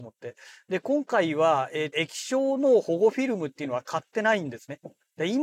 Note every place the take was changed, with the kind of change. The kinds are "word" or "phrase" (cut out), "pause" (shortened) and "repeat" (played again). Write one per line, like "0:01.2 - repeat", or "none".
0:01.9 - word